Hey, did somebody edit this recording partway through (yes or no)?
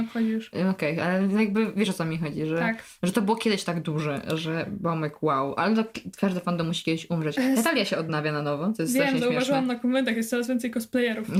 no